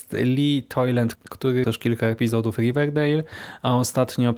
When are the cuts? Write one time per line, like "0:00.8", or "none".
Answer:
0:01.2
0:01.6